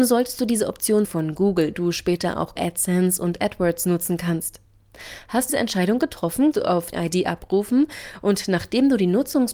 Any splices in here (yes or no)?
yes